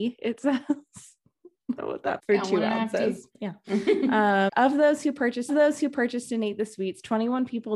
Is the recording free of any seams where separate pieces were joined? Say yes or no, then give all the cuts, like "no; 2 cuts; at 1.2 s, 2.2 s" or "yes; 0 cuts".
no; 5 cuts; at 1.8 s, 2.2 s, 3.3 s, 4.5 s, 5.5 s